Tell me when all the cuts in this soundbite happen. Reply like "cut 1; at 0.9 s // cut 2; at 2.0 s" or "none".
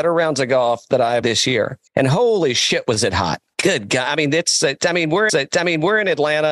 cut 1; at 1.2 s // cut 2; at 1.9 s // cut 3; at 5.3 s